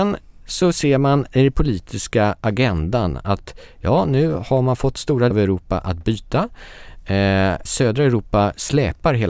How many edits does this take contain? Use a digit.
2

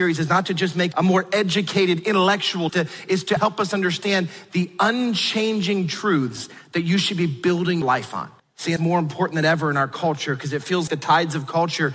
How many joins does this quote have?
7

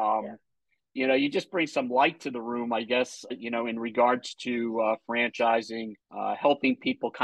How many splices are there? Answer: 2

